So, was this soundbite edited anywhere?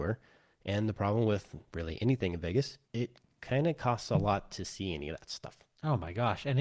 yes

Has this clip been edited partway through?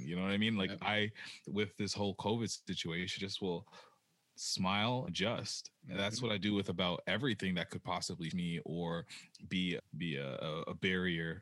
yes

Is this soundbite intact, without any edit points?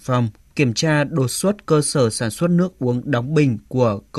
yes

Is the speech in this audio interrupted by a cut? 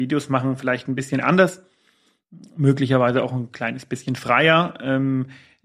no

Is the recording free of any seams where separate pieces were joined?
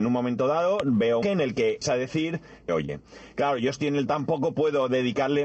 no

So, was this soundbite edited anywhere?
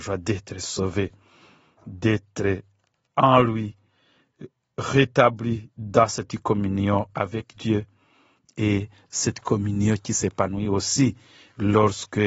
no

